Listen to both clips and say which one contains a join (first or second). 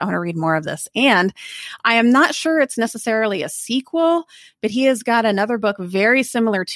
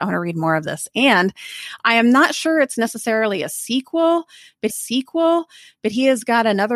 second